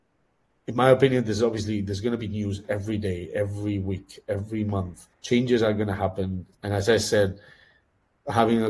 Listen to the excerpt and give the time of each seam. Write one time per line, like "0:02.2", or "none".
0:05.1
0:06.5